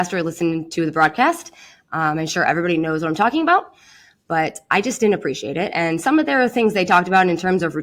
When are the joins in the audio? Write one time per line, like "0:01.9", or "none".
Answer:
none

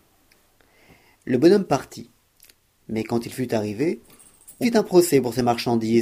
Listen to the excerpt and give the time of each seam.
0:04.6

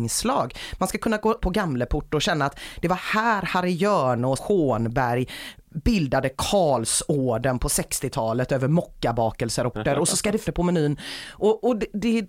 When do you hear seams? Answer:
0:01.4
0:04.4
0:09.7
0:10.4

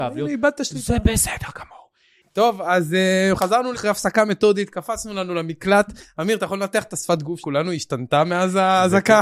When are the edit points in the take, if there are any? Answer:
0:03.4
0:03.7
0:07.4

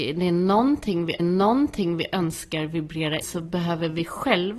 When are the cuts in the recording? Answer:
0:01.2
0:03.2

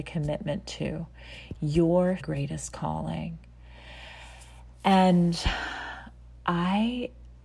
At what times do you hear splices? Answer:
0:02.2

